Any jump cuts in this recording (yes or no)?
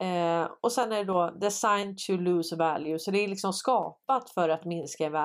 no